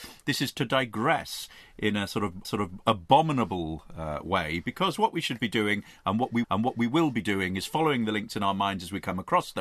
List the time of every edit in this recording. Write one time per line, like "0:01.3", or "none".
0:02.4
0:06.4